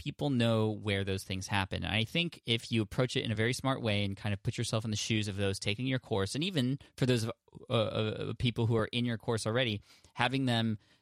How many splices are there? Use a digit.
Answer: 0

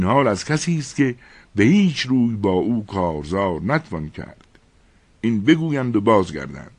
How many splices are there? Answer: 0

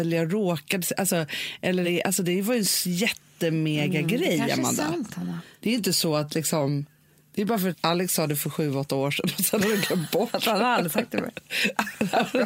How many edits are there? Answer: 2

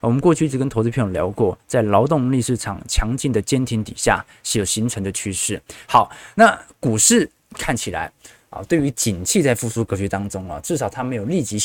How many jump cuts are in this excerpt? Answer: 0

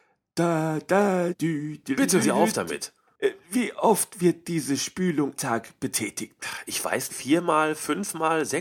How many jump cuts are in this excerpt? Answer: 4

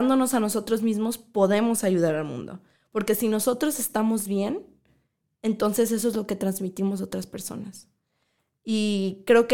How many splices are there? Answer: 0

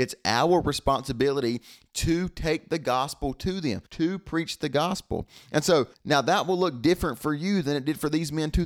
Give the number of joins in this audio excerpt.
2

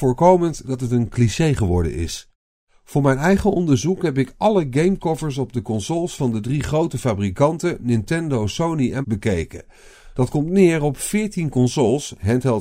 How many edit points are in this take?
1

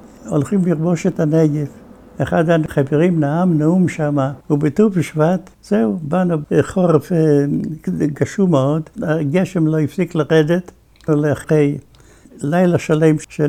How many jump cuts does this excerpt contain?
4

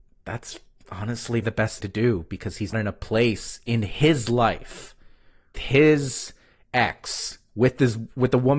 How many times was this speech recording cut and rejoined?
4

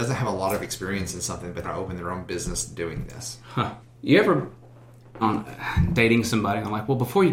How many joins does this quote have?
3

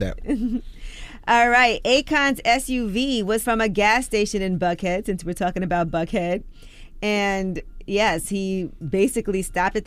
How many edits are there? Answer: 1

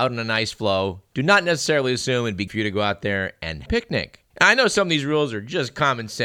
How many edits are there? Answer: 3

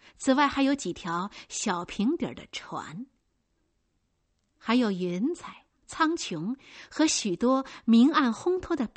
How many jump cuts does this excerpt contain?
0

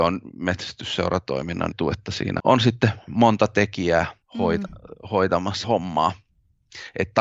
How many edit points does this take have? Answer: 4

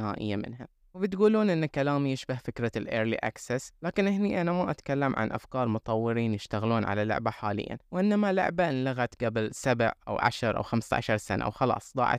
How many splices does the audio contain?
0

